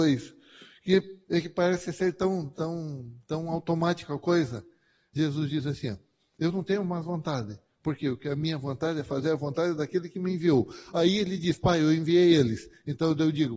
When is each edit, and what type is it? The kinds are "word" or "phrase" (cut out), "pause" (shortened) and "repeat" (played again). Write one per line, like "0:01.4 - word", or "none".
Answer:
0:01.2 - pause

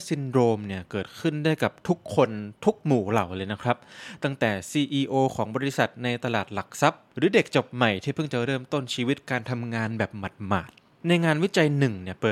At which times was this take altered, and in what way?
0:02.6 - pause
0:07.1 - pause
0:10.8 - pause

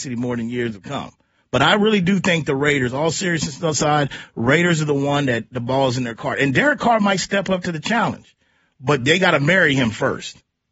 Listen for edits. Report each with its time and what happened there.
none

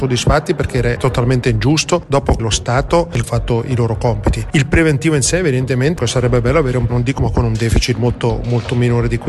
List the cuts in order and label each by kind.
0:01.0 - word
0:02.4 - word
0:03.2 - phrase
0:06.0 - phrase
0:06.9 - word
0:07.2 - word

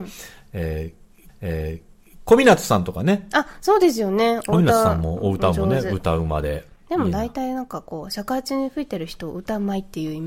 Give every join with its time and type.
0:01.3 - repeat

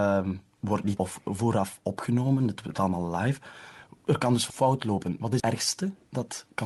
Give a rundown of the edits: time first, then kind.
0:01.0 - word
0:02.7 - word
0:04.5 - word
0:05.4 - word

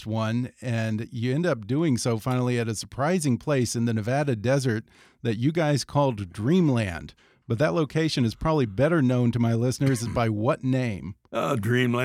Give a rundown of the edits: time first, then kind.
none

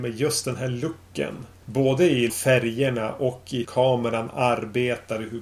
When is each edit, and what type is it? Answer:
0:02.3 - word
0:03.6 - word

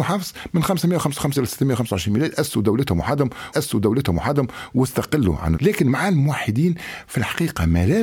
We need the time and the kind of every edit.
0:01.4 - word
0:03.5 - repeat
0:05.6 - phrase

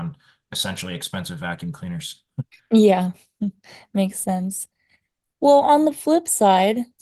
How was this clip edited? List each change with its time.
none

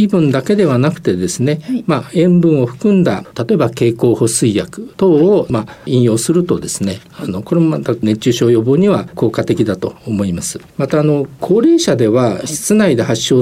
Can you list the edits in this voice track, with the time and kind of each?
0:10.7 - pause

